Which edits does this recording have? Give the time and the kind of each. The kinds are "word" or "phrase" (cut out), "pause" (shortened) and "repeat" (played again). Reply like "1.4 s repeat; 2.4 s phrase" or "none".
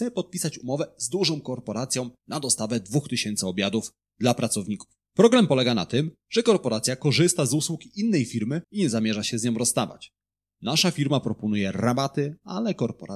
2.2 s pause; 5.0 s pause; 8.6 s pause